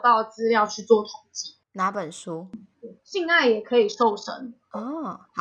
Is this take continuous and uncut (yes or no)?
no